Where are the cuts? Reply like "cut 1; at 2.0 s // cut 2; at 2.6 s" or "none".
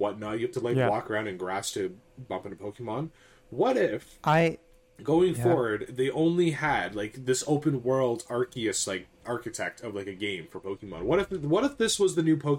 none